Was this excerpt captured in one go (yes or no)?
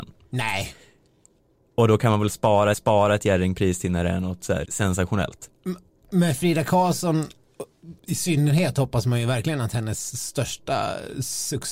no